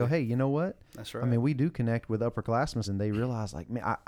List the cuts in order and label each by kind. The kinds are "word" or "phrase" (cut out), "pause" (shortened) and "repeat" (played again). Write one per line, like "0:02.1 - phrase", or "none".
0:02.8 - word